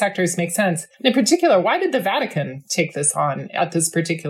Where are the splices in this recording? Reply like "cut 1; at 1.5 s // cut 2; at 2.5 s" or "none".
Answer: cut 1; at 0.9 s